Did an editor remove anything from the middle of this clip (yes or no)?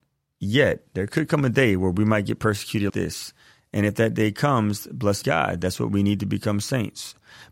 yes